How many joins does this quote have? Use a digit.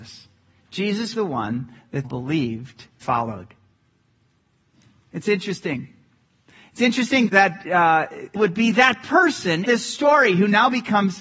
6